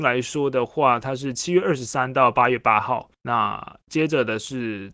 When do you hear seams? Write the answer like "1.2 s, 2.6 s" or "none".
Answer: 3.1 s